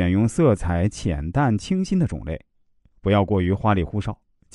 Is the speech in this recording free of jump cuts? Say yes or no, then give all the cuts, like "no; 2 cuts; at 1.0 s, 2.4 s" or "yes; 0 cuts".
yes; 0 cuts